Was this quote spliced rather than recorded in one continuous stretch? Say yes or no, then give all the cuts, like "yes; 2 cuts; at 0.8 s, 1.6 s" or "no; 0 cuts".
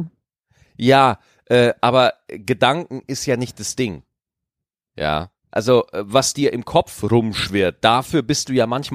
yes; 1 cut; at 5.4 s